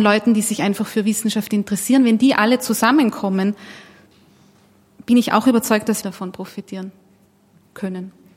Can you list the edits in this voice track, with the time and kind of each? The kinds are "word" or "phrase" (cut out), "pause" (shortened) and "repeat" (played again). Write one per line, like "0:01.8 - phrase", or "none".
0:06.0 - phrase